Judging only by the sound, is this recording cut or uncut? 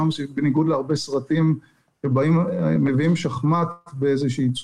uncut